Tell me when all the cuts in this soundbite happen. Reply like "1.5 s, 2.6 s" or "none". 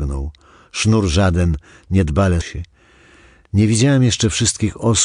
2.4 s